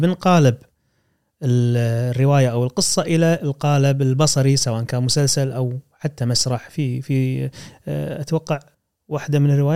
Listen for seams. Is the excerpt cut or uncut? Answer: cut